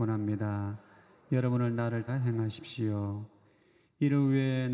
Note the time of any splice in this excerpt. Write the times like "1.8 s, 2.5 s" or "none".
2.1 s